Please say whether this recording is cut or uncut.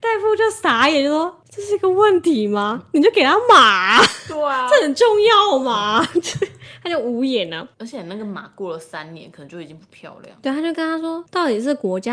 uncut